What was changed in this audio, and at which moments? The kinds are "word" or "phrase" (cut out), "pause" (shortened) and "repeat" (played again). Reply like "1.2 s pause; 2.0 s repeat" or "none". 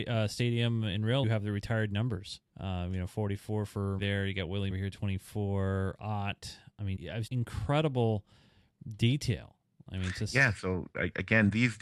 1.2 s phrase; 2.5 s pause; 4.0 s word; 4.7 s phrase; 7.0 s word; 7.3 s word